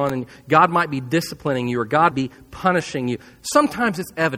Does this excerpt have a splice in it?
yes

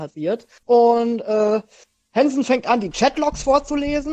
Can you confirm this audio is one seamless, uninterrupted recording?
yes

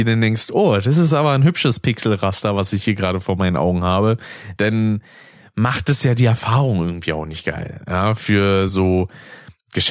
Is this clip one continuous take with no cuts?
yes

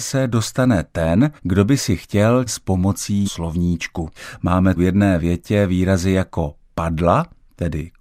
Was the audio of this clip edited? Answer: yes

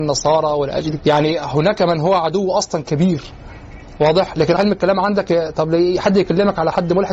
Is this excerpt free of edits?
no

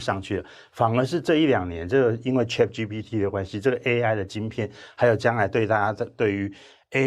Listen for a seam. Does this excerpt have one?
no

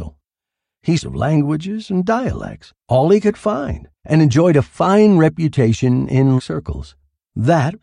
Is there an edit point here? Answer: yes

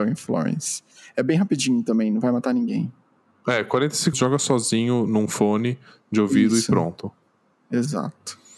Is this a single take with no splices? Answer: no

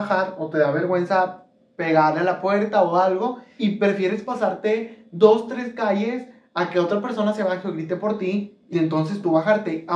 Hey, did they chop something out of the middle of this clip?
yes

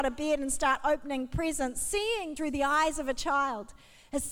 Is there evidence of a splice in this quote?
yes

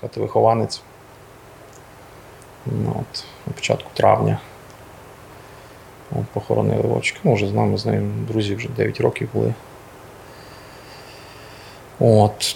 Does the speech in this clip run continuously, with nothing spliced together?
yes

